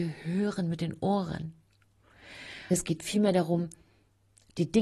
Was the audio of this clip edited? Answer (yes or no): yes